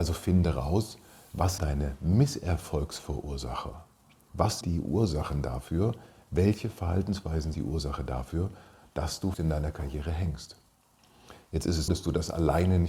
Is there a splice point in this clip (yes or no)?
yes